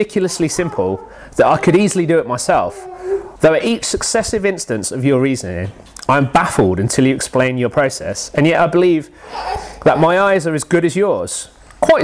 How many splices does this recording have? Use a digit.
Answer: 1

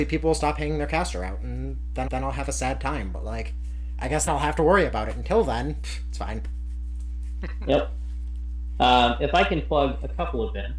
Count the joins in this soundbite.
2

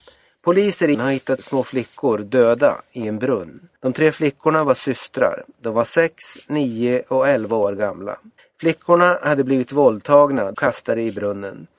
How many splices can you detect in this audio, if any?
5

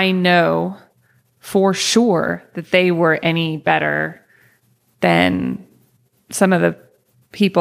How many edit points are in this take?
1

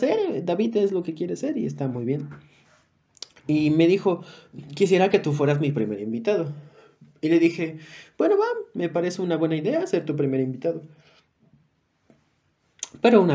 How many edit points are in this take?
0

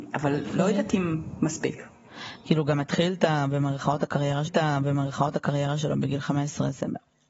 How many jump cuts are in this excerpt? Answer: 1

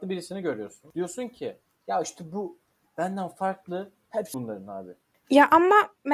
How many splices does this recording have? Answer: 2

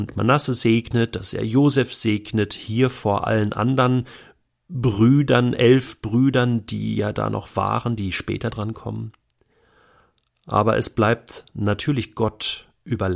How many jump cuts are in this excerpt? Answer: 0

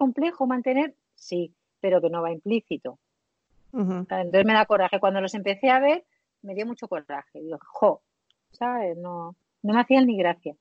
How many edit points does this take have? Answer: 0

